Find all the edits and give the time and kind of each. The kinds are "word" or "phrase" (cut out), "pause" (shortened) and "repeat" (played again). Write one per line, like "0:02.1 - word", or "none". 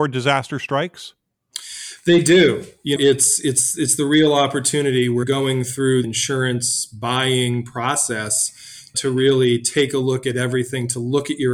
0:03.0 - word
0:05.2 - word
0:06.0 - word
0:08.9 - word